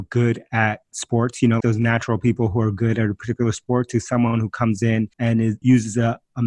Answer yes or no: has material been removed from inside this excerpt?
yes